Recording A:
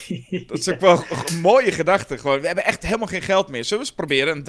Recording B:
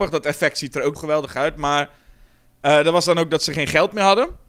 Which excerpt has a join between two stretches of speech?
B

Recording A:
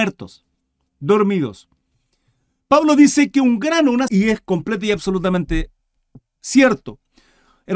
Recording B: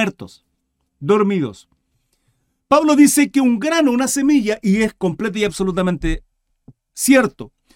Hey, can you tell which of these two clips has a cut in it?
A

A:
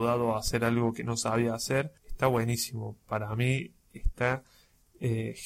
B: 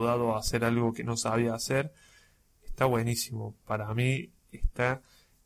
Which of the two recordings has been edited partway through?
A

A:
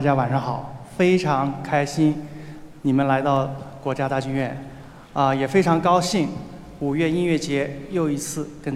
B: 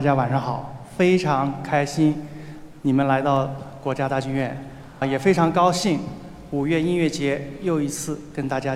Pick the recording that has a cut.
B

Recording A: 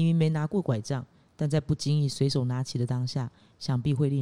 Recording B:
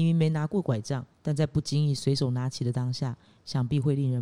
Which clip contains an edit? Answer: B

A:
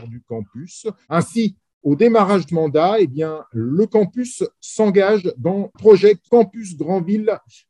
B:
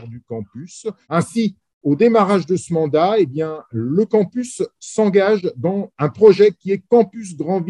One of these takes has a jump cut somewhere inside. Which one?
A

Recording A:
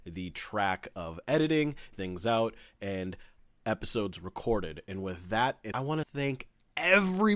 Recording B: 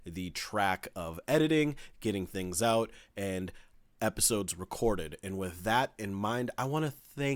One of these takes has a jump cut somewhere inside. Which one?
A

